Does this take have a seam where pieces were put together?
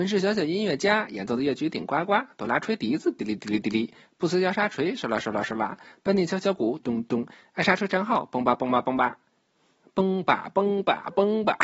yes; 1 cut; at 6.8 s

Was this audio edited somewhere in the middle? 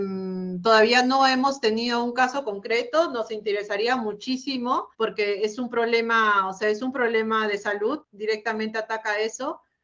yes; 2 cuts; at 4.9 s, 8.0 s

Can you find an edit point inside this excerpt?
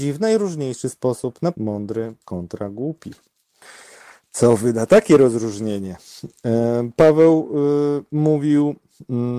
yes; 2 cuts; at 1.5 s, 2.2 s

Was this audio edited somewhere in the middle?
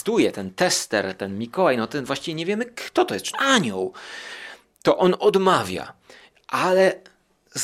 yes; 1 cut; at 3.3 s

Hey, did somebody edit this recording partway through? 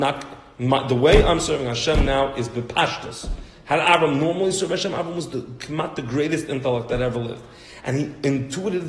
no; 0 cuts

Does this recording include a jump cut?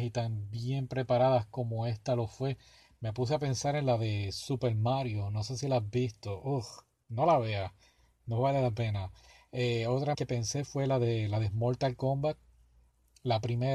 yes; 1 cut; at 10.1 s

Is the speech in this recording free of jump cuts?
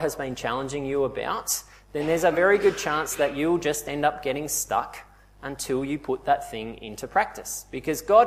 yes; 0 cuts

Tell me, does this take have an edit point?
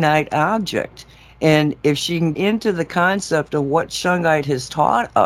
yes; 1 cut; at 2.3 s

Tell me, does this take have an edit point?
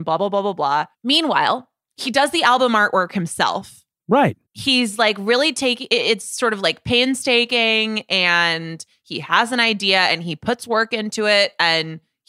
yes; 2 cuts; at 0.9 s, 4.5 s

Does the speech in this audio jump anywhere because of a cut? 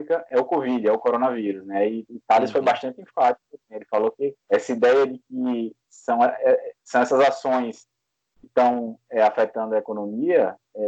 yes; 2 cuts; at 4.4 s, 8.4 s

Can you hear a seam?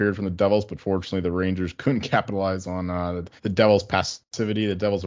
yes; 1 cut; at 3.4 s

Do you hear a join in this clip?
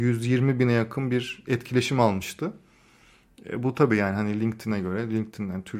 no; 0 cuts

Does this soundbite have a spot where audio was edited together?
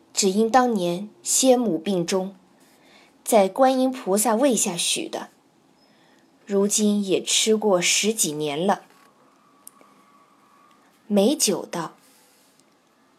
no; 0 cuts

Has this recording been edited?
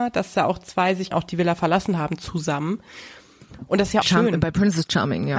yes; 2 cuts; at 1.1 s, 4.0 s

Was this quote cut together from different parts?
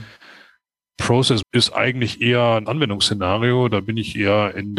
yes; 2 cuts; at 1.4 s, 2.7 s

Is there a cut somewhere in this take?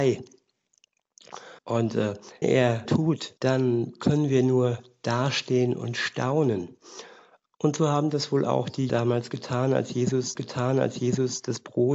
yes; 6 cuts; at 1.6 s, 2.4 s, 2.8 s, 3.4 s, 8.9 s, 10.3 s

